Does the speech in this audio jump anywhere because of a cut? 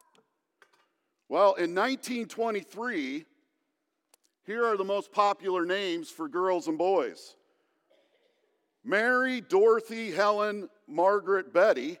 no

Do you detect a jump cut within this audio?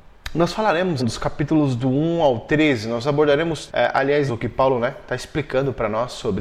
yes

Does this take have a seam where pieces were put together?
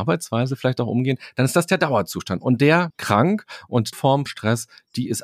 yes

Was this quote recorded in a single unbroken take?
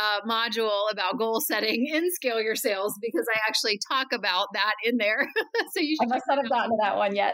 yes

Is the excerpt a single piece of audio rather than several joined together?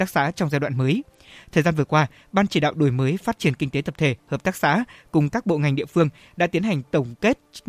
yes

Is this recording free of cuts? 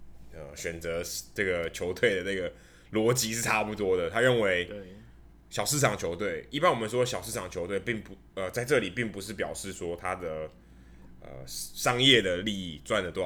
yes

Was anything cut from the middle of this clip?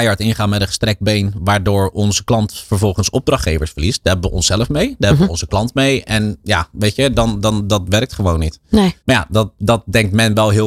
yes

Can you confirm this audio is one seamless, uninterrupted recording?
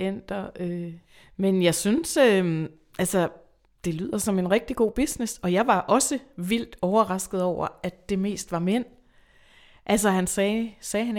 yes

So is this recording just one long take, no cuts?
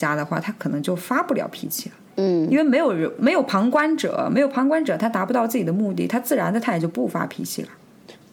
no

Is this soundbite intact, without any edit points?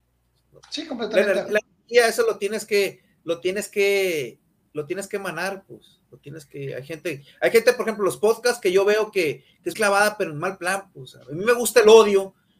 no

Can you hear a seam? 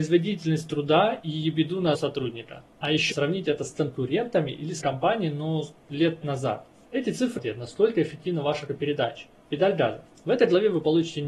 yes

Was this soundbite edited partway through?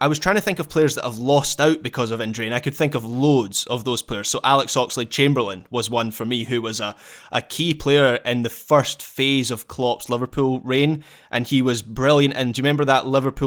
no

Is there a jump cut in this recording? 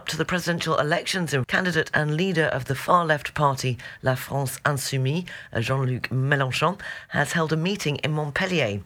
yes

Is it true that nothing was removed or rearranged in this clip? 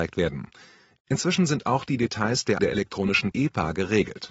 no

